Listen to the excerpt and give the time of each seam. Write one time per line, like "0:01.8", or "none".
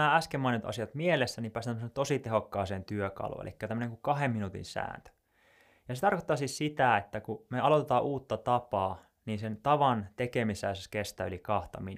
none